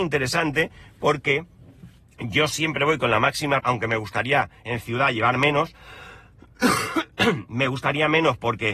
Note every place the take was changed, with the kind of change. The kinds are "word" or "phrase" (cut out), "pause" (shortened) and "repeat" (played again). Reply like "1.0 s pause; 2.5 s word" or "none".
3.6 s word